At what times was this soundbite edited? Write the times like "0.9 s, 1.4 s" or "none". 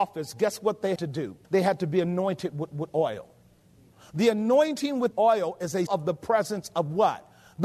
1.0 s, 1.4 s, 2.7 s, 5.1 s, 5.9 s